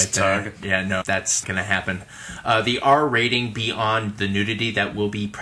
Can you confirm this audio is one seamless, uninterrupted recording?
no; 2 cuts; at 1.0 s, 1.4 s

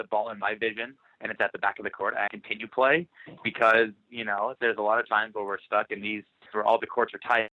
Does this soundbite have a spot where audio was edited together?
yes; 4 cuts; at 2.3 s, 3.4 s, 4.6 s, 6.5 s

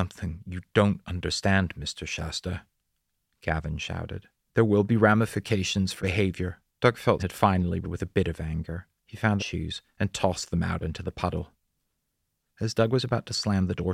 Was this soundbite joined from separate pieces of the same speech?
yes; 7 cuts; at 4.5 s, 6.0 s, 6.7 s, 7.2 s, 7.8 s, 9.0 s, 9.4 s

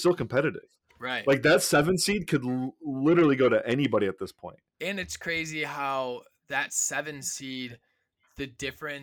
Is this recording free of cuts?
yes; 0 cuts

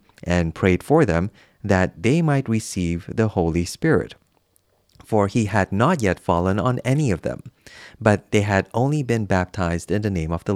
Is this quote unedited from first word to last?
yes; 0 cuts

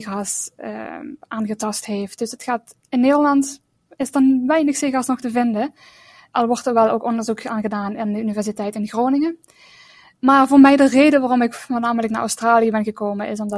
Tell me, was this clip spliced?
no; 0 cuts

